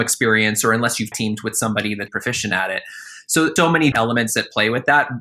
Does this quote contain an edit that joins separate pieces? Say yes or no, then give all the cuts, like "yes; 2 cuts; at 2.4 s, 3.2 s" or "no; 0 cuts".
yes; 4 cuts; at 1.1 s, 2.1 s, 3.6 s, 3.9 s